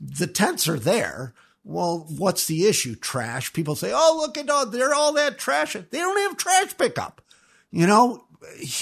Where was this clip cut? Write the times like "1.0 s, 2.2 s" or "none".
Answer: none